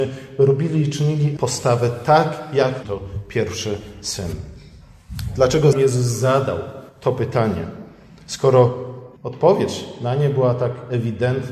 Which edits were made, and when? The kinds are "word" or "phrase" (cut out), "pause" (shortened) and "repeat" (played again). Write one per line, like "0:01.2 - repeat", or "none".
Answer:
0:01.4 - phrase
0:02.8 - word
0:05.7 - word
0:06.9 - pause
0:09.2 - pause